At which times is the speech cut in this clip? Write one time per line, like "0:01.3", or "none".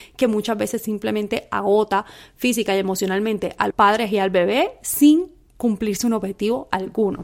0:03.7